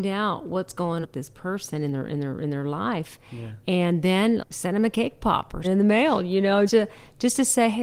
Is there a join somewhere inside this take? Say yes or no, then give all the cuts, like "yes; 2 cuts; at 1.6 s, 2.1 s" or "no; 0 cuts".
yes; 4 cuts; at 1.0 s, 4.4 s, 5.6 s, 6.7 s